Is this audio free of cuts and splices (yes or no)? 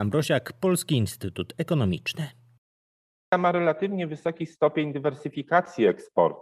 yes